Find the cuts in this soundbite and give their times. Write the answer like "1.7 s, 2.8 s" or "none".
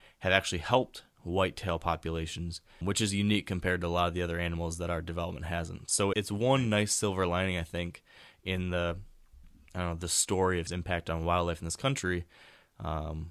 2.8 s, 6.1 s, 10.7 s

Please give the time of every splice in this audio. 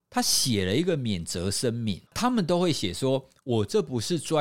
2.1 s

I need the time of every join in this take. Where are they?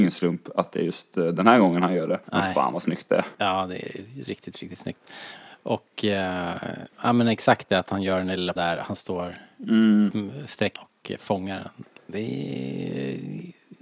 2.2 s, 3.3 s, 6.9 s, 8.6 s, 10.8 s, 12.0 s

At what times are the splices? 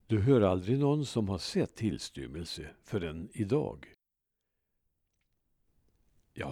1.7 s

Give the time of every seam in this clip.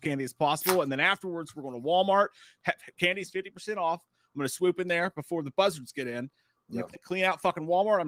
6.9 s

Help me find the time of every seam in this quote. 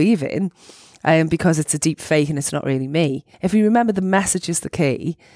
3.3 s

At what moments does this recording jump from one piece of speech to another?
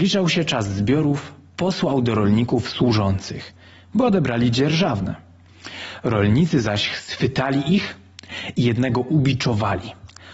none

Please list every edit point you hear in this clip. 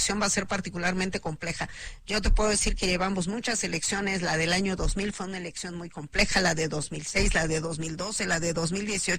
none

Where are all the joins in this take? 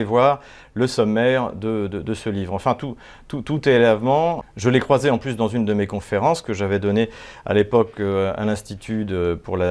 none

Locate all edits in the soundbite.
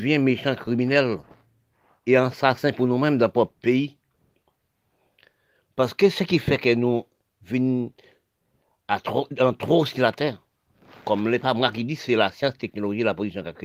none

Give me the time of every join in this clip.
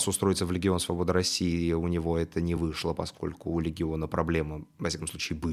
none

